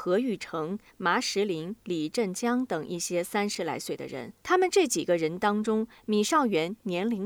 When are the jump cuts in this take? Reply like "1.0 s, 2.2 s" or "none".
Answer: 4.4 s